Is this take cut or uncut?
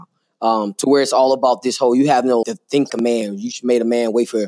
cut